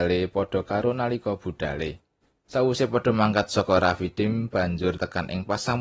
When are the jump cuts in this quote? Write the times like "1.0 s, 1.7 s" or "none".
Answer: 2.2 s